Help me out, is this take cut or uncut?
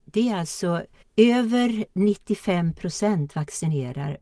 cut